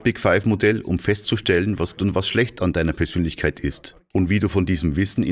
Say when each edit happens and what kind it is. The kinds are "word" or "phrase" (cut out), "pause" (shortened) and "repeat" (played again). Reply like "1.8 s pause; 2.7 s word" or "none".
2.0 s word